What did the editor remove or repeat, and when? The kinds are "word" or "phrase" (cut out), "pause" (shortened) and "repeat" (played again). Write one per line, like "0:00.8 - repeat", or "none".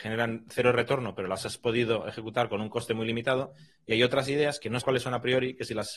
0:04.8 - word